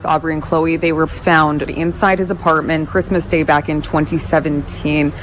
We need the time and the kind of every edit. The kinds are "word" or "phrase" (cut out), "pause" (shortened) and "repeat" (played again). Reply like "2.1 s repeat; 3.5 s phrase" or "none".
1.1 s word; 1.7 s word; 2.9 s word